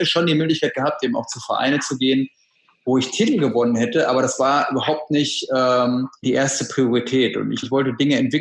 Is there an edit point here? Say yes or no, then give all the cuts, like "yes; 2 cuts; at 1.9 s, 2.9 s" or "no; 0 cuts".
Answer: no; 0 cuts